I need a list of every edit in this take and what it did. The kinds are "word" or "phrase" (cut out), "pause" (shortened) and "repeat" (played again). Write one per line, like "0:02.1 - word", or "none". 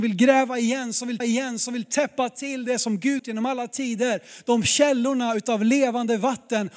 0:01.2 - repeat
0:03.2 - phrase